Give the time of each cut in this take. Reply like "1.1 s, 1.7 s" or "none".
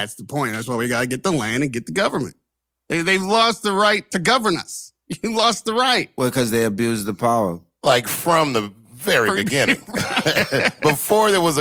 none